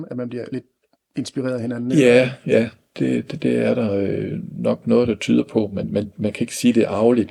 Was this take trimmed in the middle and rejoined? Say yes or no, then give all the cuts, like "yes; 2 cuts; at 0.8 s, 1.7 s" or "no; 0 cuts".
no; 0 cuts